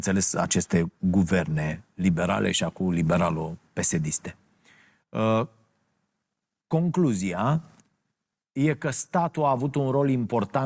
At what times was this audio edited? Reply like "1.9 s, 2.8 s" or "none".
none